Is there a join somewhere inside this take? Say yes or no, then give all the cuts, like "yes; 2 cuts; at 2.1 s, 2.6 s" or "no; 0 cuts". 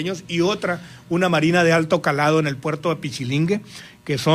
no; 0 cuts